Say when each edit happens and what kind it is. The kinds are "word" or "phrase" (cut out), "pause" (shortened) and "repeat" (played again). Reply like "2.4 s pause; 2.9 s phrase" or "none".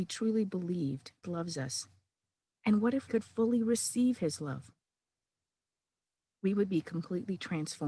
1.2 s word; 3.1 s word